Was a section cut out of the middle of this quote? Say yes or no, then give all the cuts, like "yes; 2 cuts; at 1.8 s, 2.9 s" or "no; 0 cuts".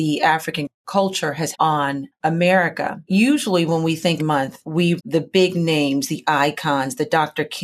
yes; 3 cuts; at 1.5 s, 4.2 s, 5.0 s